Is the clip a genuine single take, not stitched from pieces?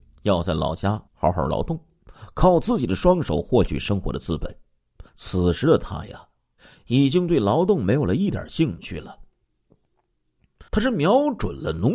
no; 3 cuts; at 1.1 s, 5.1 s, 10.7 s

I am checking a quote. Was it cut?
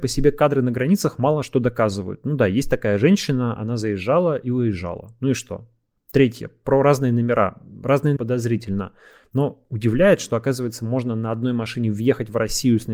yes; 1 cut; at 8.2 s

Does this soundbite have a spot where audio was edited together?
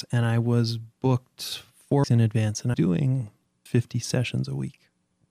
yes; 3 cuts; at 2.0 s, 2.7 s, 3.7 s

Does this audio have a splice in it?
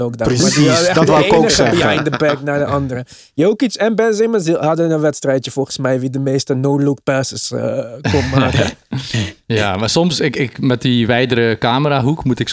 no; 0 cuts

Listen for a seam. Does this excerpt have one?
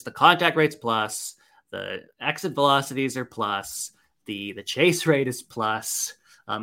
no; 0 cuts

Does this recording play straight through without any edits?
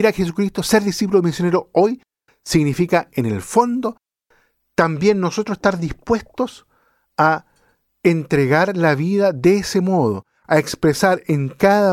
yes; 0 cuts

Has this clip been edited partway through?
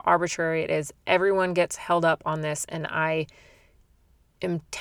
no; 0 cuts

